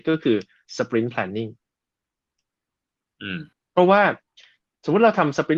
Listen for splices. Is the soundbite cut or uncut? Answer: cut